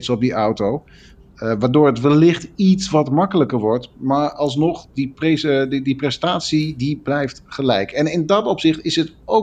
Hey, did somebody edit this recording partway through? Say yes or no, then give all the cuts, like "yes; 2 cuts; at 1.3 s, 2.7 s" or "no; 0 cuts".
no; 0 cuts